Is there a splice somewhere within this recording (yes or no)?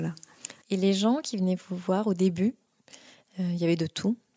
no